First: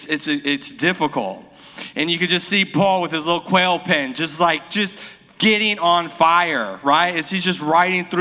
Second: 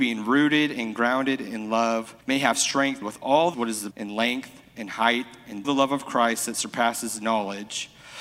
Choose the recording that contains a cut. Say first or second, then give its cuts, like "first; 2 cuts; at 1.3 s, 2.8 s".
second; 5 cuts; at 2.2 s, 3.0 s, 3.5 s, 3.9 s, 5.6 s